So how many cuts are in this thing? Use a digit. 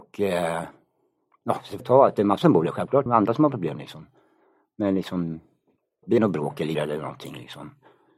5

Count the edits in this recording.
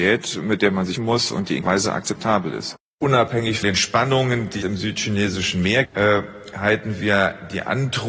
5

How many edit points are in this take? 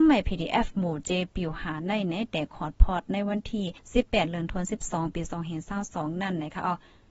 1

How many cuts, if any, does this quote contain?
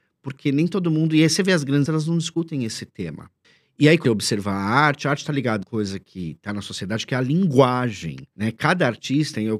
5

